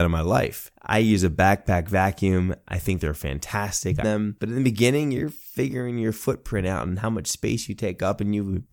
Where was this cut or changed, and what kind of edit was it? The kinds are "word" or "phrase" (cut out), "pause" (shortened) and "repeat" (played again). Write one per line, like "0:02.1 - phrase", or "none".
0:04.0 - word